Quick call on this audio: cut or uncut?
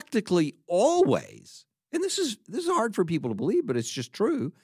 uncut